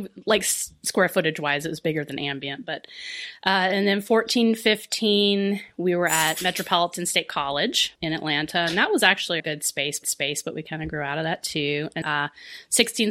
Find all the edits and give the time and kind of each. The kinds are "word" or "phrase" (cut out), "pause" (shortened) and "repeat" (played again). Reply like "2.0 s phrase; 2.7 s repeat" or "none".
8.0 s pause; 9.4 s word; 10.0 s repeat; 12.0 s word